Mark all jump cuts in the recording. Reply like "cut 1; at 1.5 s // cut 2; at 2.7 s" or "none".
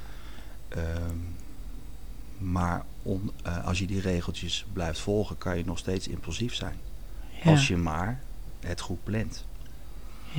none

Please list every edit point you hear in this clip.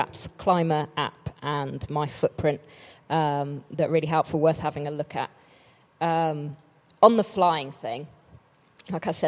none

